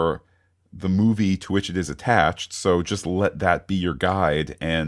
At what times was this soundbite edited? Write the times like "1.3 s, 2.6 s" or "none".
none